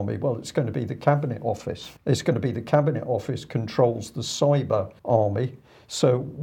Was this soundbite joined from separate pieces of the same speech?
yes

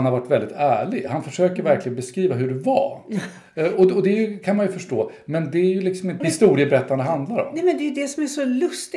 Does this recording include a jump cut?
yes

